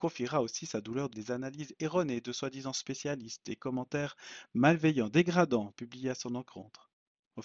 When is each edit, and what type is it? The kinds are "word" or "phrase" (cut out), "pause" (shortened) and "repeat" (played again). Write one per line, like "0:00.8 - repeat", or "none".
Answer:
0:01.1 - word